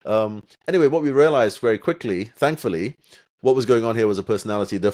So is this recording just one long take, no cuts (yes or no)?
yes